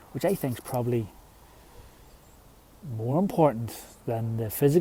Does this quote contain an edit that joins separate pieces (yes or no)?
no